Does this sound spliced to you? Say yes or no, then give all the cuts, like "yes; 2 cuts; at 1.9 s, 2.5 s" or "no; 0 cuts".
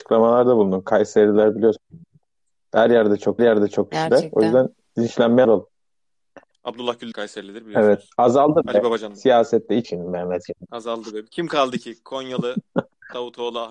yes; 6 cuts; at 3.4 s, 4.9 s, 5.4 s, 7.1 s, 8.1 s, 9.8 s